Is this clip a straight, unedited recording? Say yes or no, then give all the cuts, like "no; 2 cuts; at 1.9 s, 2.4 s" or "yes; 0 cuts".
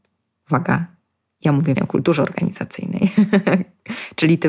no; 1 cut; at 1.8 s